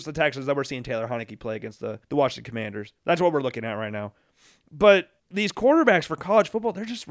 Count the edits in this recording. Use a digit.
3